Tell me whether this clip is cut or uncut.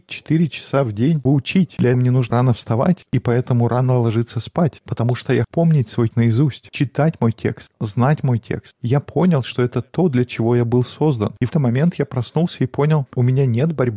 cut